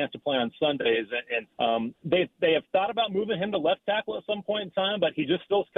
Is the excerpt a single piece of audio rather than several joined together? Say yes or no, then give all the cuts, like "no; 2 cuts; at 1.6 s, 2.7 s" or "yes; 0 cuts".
no; 1 cut; at 1.5 s